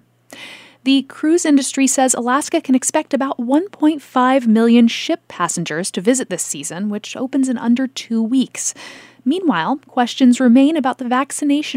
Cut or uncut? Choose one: uncut